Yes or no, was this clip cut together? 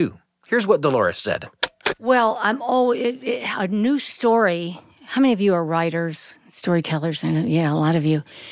no